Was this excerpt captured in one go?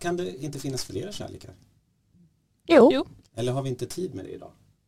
yes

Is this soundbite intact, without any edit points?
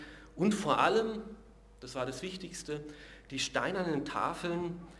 yes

